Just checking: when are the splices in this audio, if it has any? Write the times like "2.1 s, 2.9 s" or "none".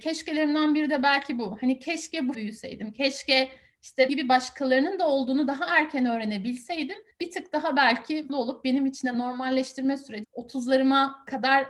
2.3 s, 4.1 s, 7.1 s, 8.3 s, 10.2 s